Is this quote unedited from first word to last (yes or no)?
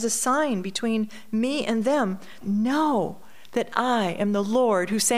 no